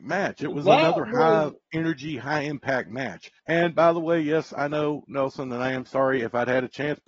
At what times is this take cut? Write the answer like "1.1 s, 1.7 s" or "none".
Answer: 3.4 s